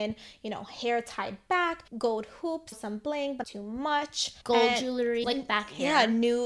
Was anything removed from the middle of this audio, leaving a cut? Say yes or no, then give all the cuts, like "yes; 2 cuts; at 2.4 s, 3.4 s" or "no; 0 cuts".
yes; 5 cuts; at 1.9 s, 2.7 s, 3.4 s, 4.4 s, 5.2 s